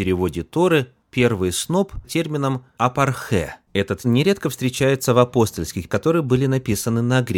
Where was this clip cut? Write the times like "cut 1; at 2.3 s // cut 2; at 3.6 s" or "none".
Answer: cut 1; at 2.0 s // cut 2; at 4.0 s // cut 3; at 5.9 s